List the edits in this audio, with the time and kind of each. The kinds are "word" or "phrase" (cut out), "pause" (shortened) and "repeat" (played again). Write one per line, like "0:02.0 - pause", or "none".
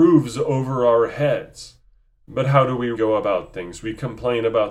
0:02.0 - pause
0:02.9 - word